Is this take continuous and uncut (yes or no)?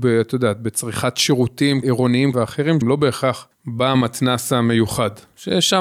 no